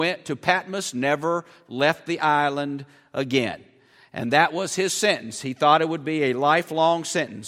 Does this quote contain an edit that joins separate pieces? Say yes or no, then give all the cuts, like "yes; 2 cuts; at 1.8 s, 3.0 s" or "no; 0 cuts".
no; 0 cuts